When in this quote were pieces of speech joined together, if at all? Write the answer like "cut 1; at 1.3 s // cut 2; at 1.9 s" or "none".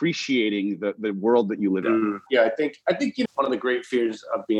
cut 1; at 1.8 s // cut 2; at 2.3 s // cut 3; at 3.2 s

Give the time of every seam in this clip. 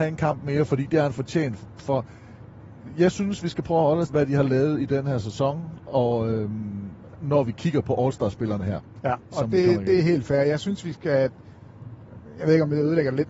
cut 1; at 4.1 s

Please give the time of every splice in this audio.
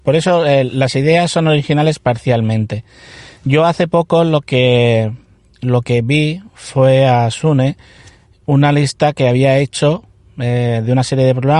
none

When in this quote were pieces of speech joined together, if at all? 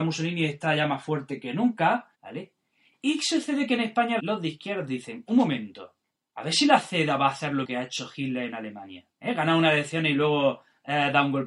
cut 1; at 2.1 s // cut 2; at 4.2 s // cut 3; at 6.0 s // cut 4; at 7.6 s // cut 5; at 9.1 s

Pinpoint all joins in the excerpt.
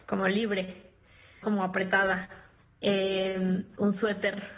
cut 1; at 1.4 s

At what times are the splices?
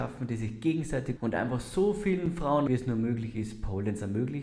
cut 1; at 1.2 s // cut 2; at 2.7 s

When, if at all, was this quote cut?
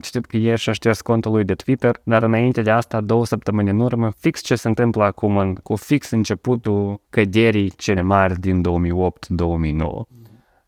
cut 1; at 2.0 s // cut 2; at 4.1 s // cut 3; at 5.6 s // cut 4; at 7.0 s // cut 5; at 8.0 s

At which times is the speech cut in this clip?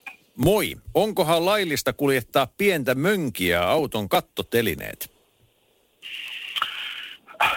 cut 1; at 4.1 s

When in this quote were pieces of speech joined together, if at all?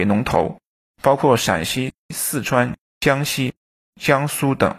cut 1; at 3.8 s

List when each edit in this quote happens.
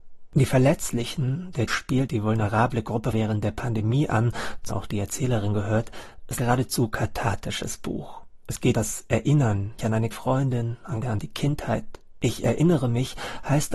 cut 1; at 1.7 s // cut 2; at 2.1 s // cut 3; at 3.1 s // cut 4; at 4.7 s // cut 5; at 6.4 s // cut 6; at 8.7 s // cut 7; at 9.8 s // cut 8; at 10.1 s // cut 9; at 11.0 s

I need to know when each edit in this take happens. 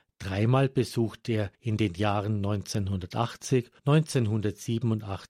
cut 1; at 1.5 s // cut 2; at 3.8 s

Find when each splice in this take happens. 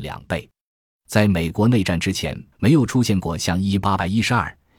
cut 1; at 2.5 s

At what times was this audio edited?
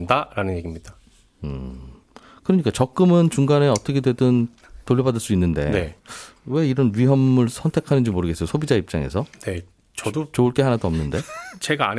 none

